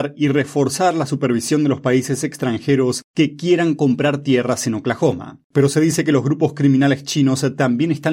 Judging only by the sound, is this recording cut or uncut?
cut